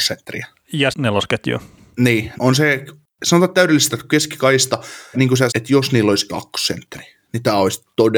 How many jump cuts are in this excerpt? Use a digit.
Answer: 6